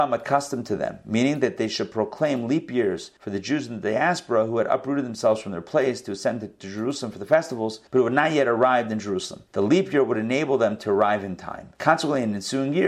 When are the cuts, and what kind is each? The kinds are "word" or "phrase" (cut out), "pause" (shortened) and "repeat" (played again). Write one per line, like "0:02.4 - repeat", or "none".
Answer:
0:03.2 - pause
0:07.9 - pause
0:09.5 - pause
0:11.7 - pause